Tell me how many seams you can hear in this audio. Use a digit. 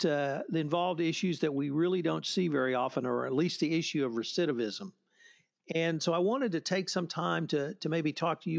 0